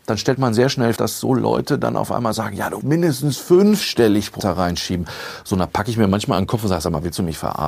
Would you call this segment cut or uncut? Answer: cut